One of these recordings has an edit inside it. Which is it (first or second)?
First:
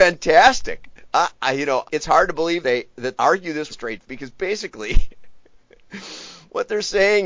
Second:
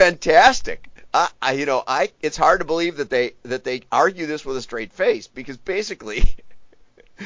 first